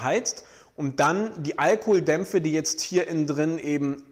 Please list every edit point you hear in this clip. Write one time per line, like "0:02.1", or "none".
none